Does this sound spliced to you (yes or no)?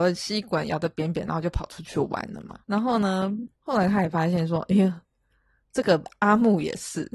yes